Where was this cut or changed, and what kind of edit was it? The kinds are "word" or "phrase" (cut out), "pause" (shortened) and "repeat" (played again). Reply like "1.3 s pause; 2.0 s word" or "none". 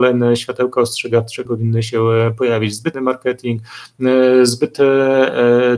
1.5 s word; 2.9 s word